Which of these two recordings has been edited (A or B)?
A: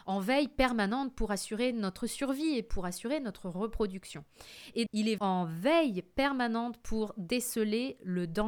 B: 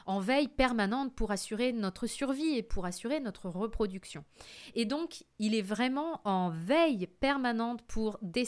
A